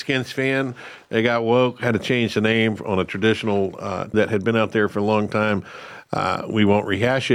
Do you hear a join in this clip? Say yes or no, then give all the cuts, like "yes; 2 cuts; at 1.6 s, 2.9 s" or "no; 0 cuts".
yes; 1 cut; at 4.1 s